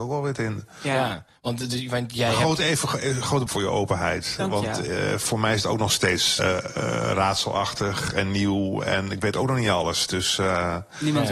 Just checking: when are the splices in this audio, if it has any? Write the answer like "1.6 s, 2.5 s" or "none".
3.5 s, 6.4 s